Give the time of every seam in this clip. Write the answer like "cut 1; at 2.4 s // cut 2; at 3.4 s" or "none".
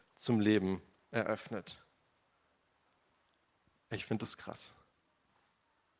none